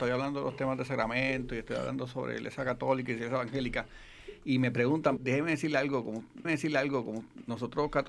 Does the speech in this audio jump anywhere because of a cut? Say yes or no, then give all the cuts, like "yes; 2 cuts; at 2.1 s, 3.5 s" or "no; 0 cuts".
yes; 2 cuts; at 5.2 s, 6.4 s